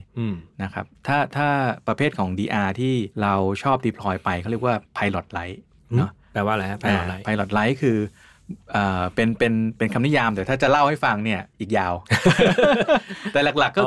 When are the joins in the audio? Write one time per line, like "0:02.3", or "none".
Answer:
0:03.1
0:04.9
0:05.8
0:11.5